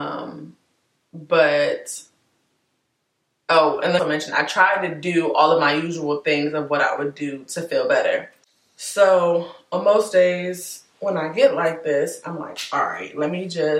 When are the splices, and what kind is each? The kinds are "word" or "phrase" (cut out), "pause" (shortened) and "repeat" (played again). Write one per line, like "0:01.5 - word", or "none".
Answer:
0:04.0 - word